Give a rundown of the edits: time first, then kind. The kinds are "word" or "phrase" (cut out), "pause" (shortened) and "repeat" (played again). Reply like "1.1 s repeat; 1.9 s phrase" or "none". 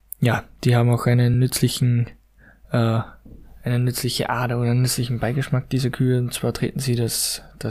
none